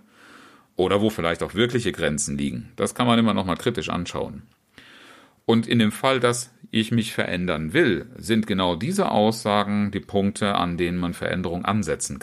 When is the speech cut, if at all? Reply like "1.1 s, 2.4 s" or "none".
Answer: none